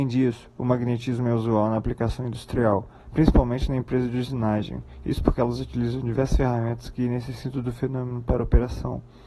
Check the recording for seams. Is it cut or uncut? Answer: cut